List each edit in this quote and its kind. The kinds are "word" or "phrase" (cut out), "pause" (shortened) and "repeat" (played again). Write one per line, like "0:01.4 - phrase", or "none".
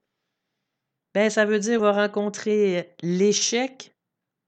0:01.8 - phrase

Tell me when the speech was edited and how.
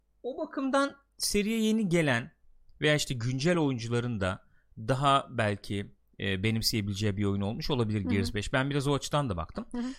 none

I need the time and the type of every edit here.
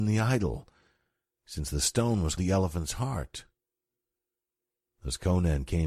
0:02.4 - word

